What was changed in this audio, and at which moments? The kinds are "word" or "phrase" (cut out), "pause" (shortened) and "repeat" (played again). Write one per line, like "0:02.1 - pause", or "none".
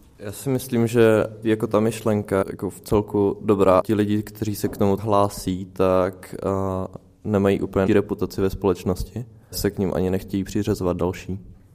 0:01.4 - word
0:02.4 - word
0:03.8 - word
0:05.0 - word
0:07.9 - word
0:09.5 - word